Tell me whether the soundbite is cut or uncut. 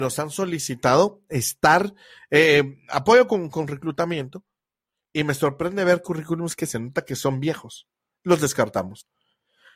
uncut